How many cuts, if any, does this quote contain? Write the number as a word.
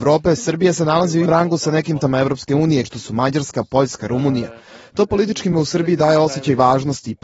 five